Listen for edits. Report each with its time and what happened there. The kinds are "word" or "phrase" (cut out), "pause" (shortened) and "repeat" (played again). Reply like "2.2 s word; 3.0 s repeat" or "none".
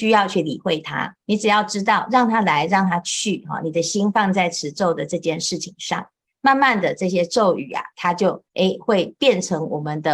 1.2 s pause; 8.5 s pause